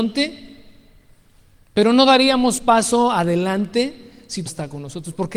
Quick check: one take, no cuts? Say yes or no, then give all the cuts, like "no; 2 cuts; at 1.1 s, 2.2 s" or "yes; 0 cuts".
no; 2 cuts; at 2.6 s, 4.5 s